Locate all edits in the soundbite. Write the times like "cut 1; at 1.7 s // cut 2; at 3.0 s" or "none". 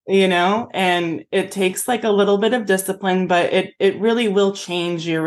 none